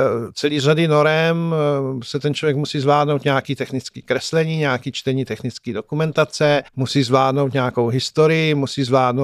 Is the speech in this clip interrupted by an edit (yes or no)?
yes